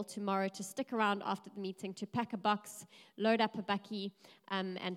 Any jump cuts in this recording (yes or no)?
no